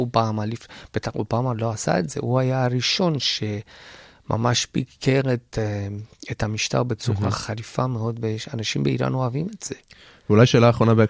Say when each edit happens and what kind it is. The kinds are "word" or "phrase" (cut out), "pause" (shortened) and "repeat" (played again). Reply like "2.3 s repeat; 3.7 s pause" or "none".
none